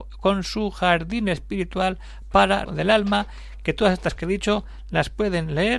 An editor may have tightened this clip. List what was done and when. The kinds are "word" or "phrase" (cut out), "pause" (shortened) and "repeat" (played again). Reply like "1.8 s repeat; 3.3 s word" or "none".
2.7 s word; 4.2 s word